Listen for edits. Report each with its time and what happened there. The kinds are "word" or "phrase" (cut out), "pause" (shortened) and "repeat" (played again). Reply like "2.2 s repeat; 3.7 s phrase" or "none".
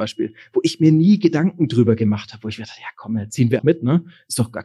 3.6 s word